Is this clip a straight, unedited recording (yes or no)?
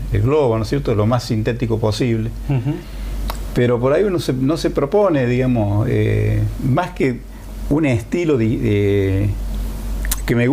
yes